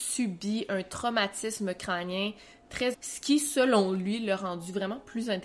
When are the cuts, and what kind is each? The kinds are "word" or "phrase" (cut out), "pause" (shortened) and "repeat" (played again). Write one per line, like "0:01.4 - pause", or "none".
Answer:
0:02.9 - word